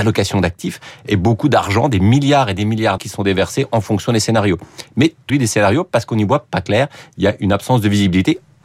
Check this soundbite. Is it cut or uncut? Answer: cut